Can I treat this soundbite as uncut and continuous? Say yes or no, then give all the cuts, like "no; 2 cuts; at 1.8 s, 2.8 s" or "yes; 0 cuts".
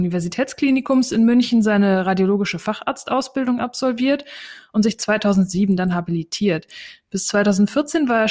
yes; 0 cuts